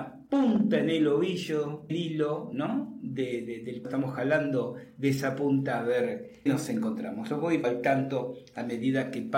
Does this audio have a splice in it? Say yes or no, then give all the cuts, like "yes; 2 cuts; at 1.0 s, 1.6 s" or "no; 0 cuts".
yes; 4 cuts; at 1.9 s, 3.8 s, 6.5 s, 7.6 s